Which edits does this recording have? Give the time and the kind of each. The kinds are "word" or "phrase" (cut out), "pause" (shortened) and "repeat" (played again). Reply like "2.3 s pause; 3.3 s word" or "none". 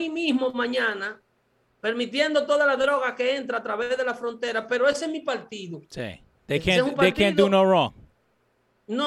1.4 s pause; 6.3 s pause